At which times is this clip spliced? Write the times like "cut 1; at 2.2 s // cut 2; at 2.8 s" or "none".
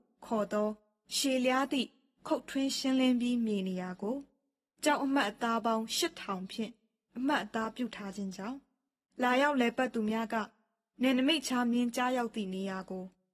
none